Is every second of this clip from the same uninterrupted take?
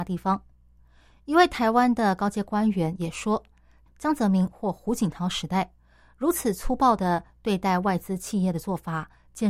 no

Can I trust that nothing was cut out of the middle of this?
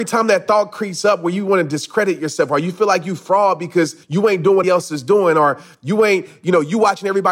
no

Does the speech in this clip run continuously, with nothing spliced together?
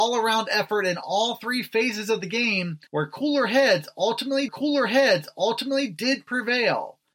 no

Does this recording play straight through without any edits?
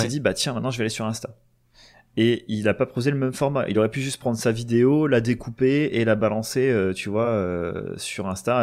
yes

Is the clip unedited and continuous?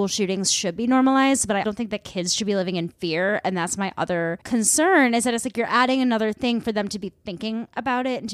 no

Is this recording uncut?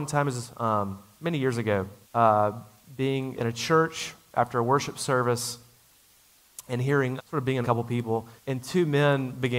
no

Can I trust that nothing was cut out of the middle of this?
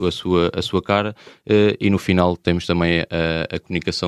yes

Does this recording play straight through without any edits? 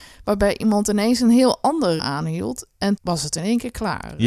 no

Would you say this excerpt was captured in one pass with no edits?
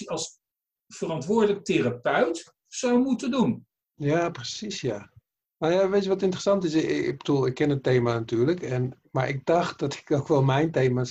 yes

